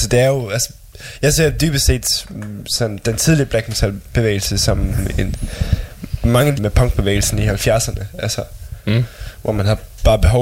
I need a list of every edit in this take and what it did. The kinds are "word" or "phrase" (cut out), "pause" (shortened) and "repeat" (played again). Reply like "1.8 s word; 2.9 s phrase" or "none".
3.0 s word; 6.6 s phrase

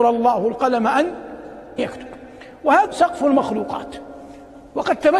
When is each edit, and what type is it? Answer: 1.8 s word; 2.9 s word

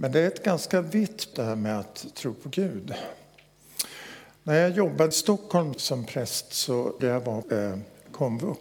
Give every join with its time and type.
1.3 s word; 5.1 s word; 5.7 s word; 7.0 s word; 7.4 s word

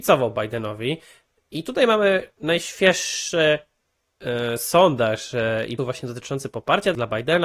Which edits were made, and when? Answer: 5.8 s word

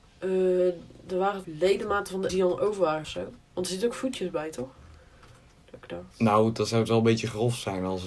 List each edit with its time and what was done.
1.4 s word; 2.3 s word; 3.0 s phrase; 6.1 s pause

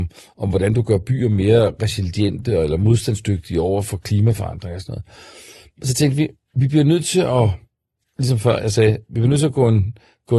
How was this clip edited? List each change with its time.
none

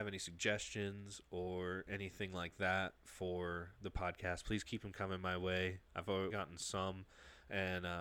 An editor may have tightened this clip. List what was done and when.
5.9 s pause; 6.3 s phrase

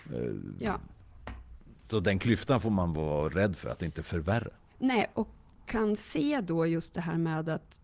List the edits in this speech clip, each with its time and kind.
none

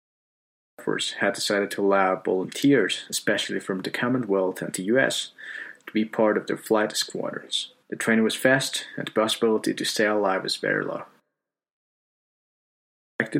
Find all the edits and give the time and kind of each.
7.8 s pause

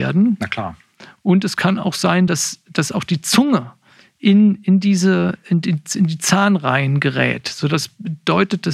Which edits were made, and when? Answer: none

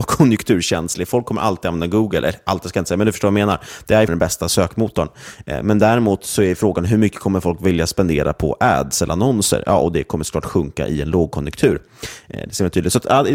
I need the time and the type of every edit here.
4.1 s word

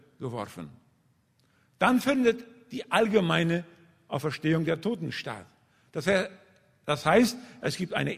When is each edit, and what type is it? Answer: none

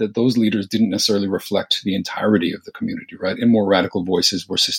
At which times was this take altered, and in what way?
none

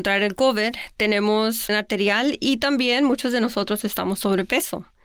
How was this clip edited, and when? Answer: 1.7 s phrase

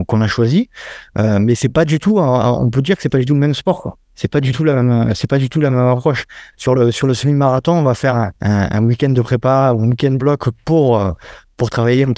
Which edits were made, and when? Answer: 6.5 s pause; 8.4 s pause

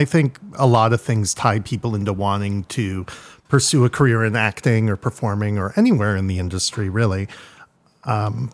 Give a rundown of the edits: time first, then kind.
none

